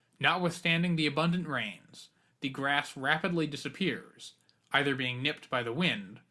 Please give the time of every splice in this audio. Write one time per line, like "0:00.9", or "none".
none

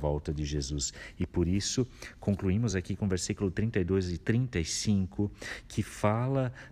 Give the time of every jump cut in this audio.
none

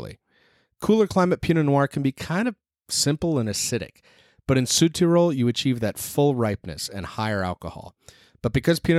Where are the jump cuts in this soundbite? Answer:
none

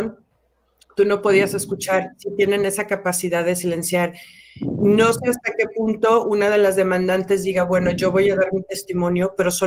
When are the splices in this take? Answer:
none

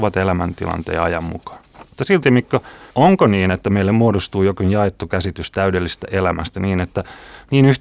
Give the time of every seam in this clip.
0:01.9
0:02.9

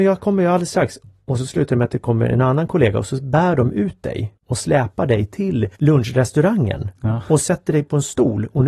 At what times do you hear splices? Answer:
0:04.4
0:05.7

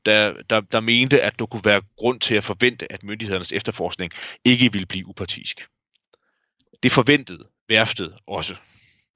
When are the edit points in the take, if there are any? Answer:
none

